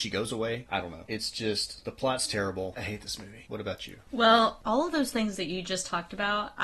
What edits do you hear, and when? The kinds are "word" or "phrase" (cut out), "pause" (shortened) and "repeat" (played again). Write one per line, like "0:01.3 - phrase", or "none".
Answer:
none